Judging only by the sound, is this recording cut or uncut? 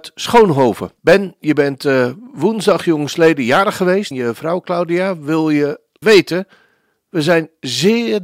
cut